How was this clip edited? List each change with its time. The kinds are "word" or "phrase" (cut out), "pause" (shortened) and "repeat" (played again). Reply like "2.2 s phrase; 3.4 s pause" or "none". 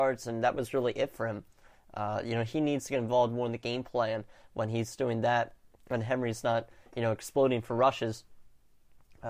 none